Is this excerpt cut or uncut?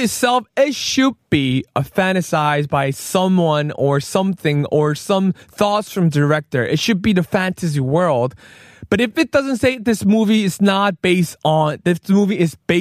cut